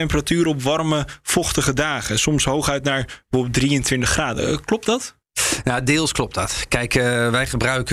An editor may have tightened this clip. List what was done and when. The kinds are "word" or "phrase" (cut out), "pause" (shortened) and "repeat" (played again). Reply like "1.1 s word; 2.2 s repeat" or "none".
5.2 s pause